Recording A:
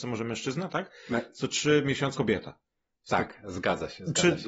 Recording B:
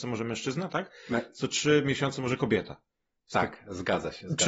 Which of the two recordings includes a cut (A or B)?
A